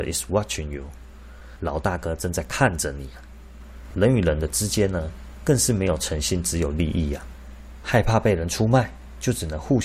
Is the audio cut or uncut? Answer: uncut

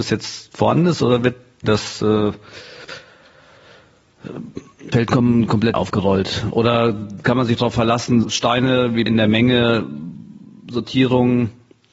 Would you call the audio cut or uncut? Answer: cut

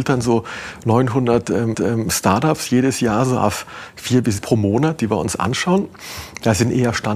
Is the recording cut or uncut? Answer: cut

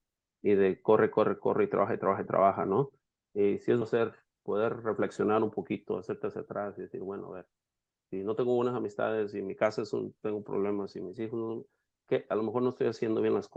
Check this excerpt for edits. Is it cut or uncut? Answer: cut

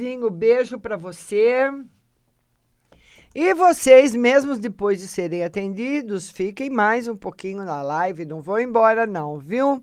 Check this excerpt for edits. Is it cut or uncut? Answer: uncut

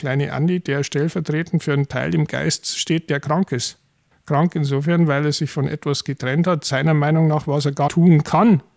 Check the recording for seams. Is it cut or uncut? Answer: cut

